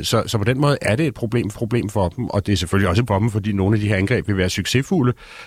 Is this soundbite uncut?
no; 2 cuts; at 1.5 s, 3.1 s

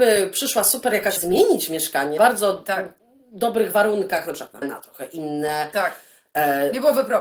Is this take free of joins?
no; 3 cuts; at 1.2 s, 2.2 s, 4.6 s

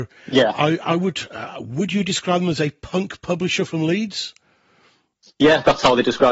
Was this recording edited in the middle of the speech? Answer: no; 0 cuts

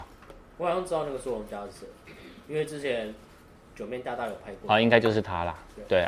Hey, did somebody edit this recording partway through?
no; 0 cuts

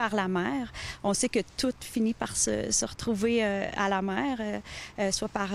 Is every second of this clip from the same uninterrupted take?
yes; 0 cuts

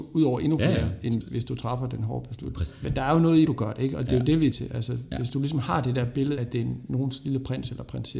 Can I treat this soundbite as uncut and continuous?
no; 5 cuts; at 1.2 s, 3.5 s, 4.5 s, 5.3 s, 6.4 s

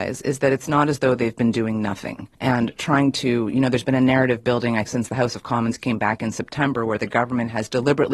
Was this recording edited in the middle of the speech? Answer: yes; 2 cuts; at 2.3 s, 4.9 s

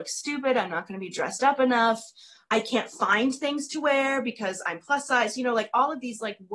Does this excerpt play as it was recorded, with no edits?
yes; 0 cuts

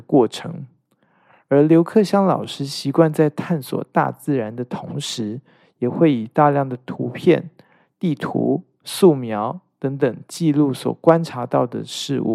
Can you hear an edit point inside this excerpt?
no; 0 cuts

